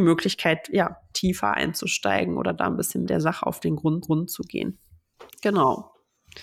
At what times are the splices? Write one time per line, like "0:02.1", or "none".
0:01.1
0:03.0
0:04.0
0:05.3